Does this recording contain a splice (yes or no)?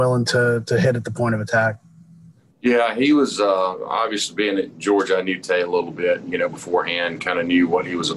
no